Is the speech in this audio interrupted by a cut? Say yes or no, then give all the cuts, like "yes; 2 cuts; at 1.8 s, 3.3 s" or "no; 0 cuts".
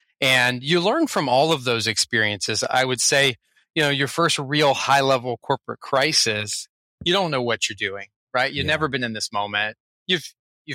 no; 0 cuts